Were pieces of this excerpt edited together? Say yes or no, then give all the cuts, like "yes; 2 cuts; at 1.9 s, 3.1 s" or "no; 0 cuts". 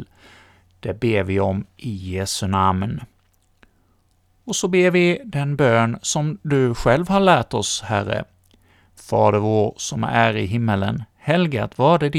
no; 0 cuts